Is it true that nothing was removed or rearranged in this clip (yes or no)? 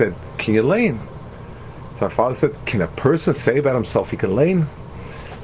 yes